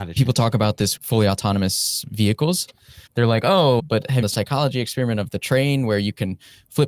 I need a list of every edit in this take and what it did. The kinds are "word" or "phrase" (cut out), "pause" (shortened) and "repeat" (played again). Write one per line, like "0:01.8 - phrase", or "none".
0:01.0 - word
0:03.1 - pause
0:03.8 - word
0:04.2 - phrase